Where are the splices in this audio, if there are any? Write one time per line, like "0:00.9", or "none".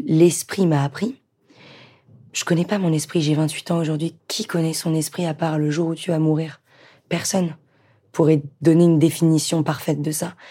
none